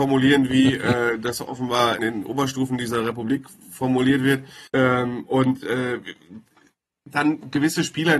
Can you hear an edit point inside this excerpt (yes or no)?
yes